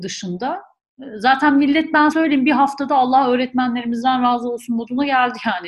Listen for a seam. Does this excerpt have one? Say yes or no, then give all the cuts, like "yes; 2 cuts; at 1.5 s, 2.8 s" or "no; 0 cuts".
yes; 1 cut; at 2.1 s